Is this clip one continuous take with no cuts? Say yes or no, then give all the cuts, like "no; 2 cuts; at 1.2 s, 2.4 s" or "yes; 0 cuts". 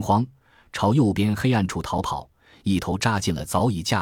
yes; 0 cuts